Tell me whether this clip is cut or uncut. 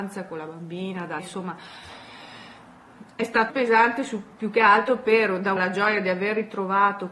cut